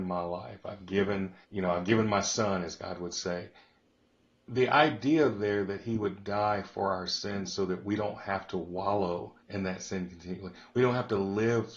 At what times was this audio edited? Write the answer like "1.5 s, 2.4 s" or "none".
1.4 s, 9.4 s